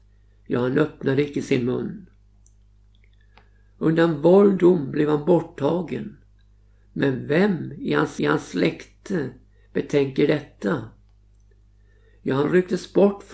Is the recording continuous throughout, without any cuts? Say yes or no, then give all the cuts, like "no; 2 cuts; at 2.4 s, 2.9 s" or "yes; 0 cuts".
no; 2 cuts; at 4.6 s, 8.2 s